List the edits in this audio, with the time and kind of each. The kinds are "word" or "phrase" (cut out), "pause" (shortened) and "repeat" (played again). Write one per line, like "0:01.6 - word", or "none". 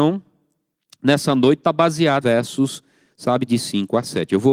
0:02.2 - word
0:03.5 - word